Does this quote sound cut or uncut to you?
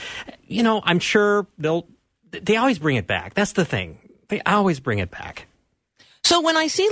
uncut